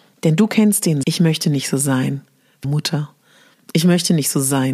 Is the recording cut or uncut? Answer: cut